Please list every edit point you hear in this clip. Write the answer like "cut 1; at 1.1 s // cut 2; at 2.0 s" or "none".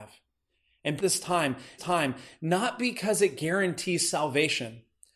cut 1; at 1.0 s // cut 2; at 1.8 s